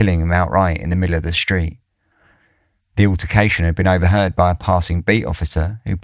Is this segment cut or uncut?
uncut